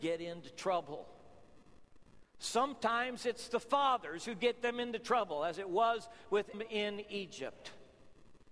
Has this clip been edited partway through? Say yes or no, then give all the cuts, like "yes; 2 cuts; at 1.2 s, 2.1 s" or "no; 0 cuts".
yes; 1 cut; at 6.5 s